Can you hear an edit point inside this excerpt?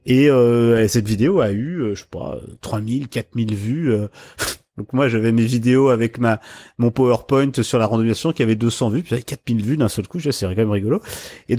no; 0 cuts

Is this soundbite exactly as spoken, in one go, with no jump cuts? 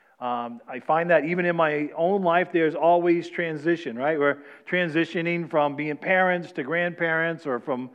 yes; 0 cuts

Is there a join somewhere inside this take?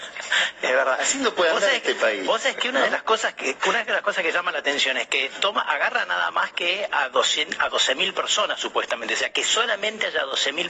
no; 0 cuts

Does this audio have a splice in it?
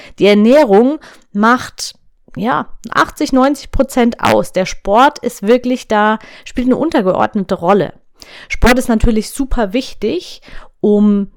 no; 0 cuts

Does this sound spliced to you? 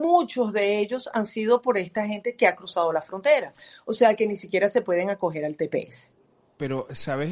no; 0 cuts

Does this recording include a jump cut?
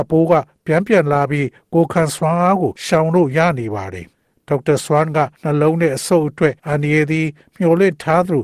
yes; 3 cuts; at 2.8 s, 5.3 s, 6.6 s

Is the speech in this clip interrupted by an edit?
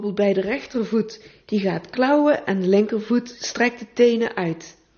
no; 0 cuts

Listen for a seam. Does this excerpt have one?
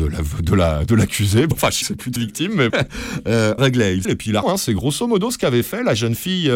yes; 7 cuts; at 1.5 s, 1.8 s, 2.2 s, 2.7 s, 3.6 s, 4.0 s, 4.4 s

